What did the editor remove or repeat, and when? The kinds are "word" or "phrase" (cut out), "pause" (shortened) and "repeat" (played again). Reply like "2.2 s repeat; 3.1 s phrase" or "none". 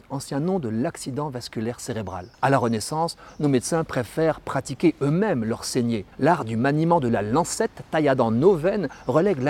2.3 s pause; 6.1 s pause